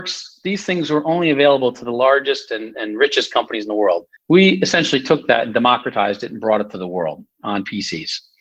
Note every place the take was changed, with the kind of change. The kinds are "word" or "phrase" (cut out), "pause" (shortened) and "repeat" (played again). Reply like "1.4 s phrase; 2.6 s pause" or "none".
4.2 s pause